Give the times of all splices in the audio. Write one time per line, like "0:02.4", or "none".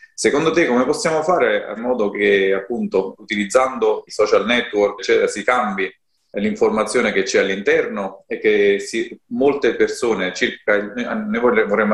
0:01.8
0:03.2
0:04.1
0:05.0